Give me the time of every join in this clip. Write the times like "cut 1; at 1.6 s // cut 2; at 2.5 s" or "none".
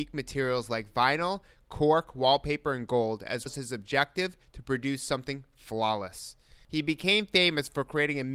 cut 1; at 3.5 s